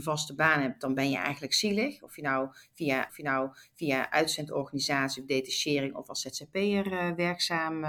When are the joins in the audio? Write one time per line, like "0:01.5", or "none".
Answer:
0:03.1